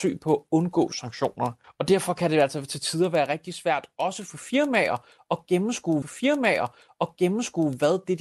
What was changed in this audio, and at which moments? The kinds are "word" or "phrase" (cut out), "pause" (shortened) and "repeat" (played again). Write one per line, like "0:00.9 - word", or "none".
0:01.6 - pause
0:06.0 - repeat